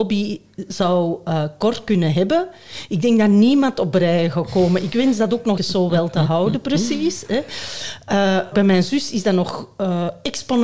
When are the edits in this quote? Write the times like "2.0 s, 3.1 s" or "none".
5.6 s, 8.5 s